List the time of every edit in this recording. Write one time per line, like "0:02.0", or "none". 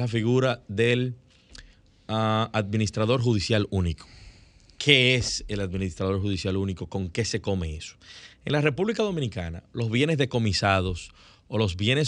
none